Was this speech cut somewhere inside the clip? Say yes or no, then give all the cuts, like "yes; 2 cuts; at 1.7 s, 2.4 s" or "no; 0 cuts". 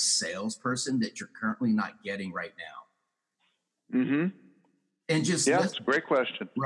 no; 0 cuts